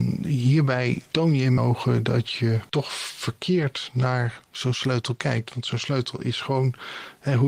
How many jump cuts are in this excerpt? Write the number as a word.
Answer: one